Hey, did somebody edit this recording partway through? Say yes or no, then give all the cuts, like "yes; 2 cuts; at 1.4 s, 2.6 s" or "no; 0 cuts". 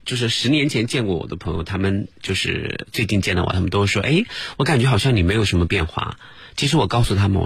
yes; 1 cut; at 2.1 s